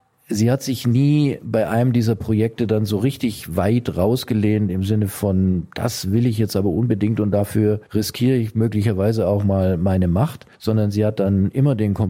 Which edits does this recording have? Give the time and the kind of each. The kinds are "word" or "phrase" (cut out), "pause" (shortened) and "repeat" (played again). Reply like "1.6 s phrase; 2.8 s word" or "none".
7.9 s pause; 10.5 s pause